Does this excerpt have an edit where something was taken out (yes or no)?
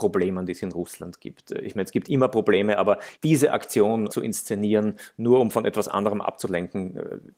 yes